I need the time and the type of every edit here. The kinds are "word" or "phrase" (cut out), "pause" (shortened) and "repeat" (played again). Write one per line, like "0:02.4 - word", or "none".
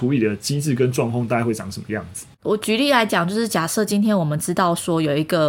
0:02.3 - pause